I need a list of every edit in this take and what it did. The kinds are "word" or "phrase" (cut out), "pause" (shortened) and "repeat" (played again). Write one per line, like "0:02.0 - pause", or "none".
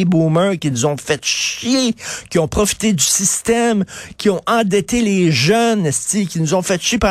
none